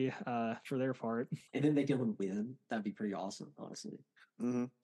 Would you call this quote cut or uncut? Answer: cut